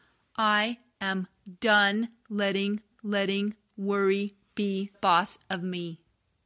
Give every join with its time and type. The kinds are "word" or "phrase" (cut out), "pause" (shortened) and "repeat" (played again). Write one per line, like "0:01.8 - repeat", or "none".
0:02.9 - repeat
0:04.9 - word